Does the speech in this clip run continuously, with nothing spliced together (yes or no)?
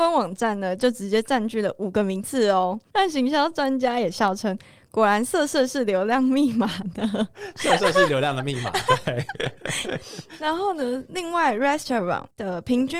yes